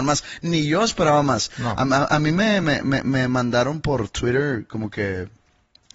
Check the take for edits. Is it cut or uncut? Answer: uncut